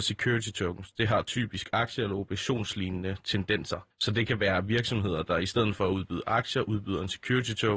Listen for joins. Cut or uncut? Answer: uncut